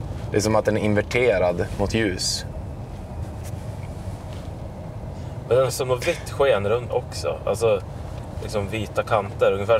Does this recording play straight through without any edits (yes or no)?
no